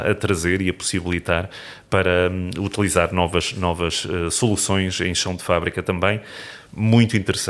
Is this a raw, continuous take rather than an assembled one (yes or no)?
yes